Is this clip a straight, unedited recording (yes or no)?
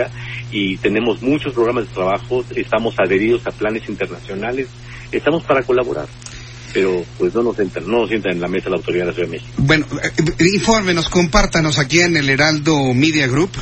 yes